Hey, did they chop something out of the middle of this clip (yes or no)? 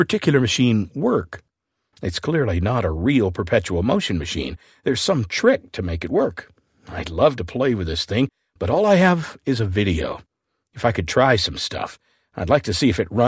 no